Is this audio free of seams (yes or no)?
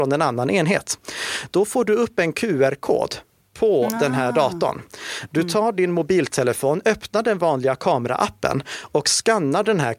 yes